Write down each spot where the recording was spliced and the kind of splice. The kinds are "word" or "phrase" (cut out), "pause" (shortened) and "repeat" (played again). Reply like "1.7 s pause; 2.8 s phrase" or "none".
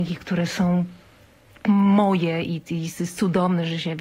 none